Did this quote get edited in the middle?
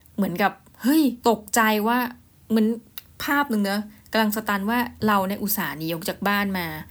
yes; 1 cut; at 1.2 s

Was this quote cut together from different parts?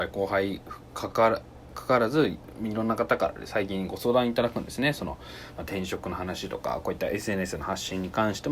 no; 0 cuts

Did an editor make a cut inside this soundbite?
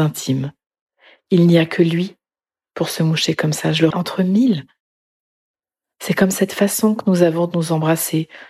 yes; 1 cut; at 3.9 s

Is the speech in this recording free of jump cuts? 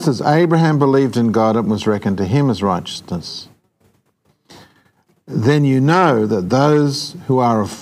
yes; 0 cuts

